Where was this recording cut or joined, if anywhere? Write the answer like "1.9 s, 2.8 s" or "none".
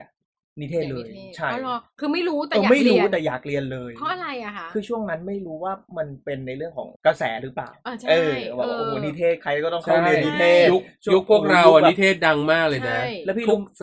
7.0 s